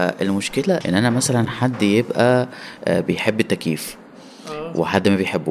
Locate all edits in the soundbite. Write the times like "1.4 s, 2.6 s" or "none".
none

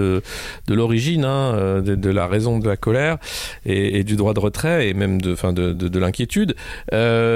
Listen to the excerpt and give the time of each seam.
none

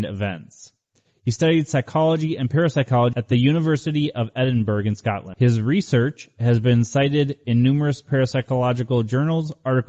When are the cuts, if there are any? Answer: none

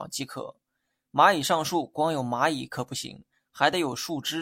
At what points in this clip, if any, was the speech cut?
none

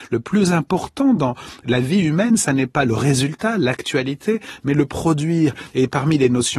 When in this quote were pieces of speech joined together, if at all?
none

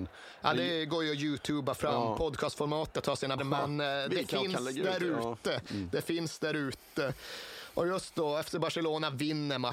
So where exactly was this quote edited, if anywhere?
3.4 s

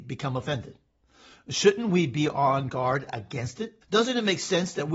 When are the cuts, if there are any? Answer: 3.8 s

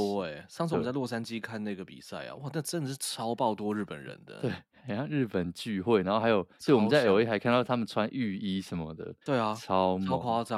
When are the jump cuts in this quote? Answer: 9.2 s

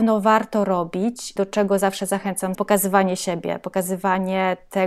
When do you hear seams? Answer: 1.4 s, 2.5 s

